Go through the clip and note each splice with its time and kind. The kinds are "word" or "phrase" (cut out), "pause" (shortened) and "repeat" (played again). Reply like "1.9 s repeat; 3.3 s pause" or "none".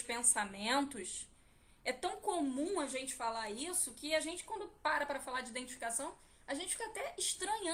none

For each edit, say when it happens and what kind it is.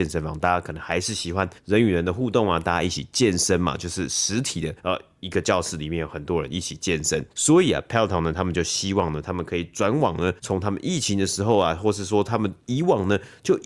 1.6 s pause; 4.8 s pause; 7.3 s pause; 10.4 s pause

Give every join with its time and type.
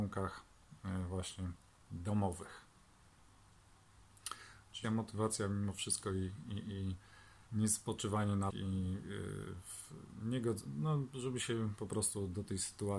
4.8 s word; 7.5 s pause; 8.5 s word

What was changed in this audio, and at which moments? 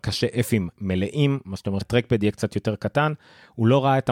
1.8 s word

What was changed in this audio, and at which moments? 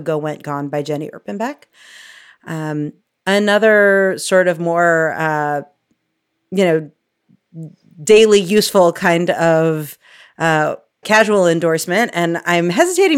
11.0 s word

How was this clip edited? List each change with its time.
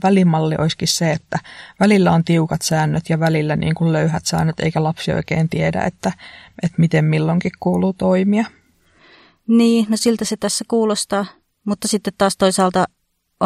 none

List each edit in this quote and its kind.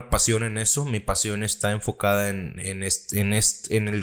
2.6 s word

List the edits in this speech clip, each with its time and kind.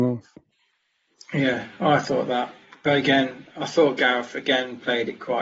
none

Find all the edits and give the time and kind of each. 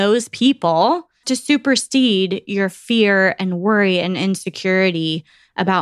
1.2 s word

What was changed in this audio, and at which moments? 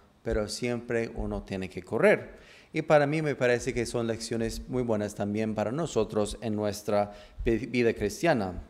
none

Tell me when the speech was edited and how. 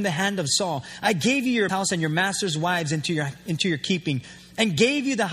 1.7 s word

